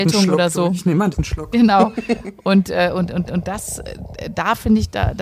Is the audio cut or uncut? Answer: cut